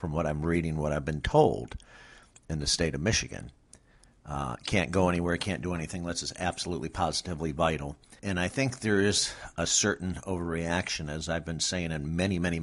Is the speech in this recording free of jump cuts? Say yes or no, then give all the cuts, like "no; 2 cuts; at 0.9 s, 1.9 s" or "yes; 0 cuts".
no; 1 cut; at 8.2 s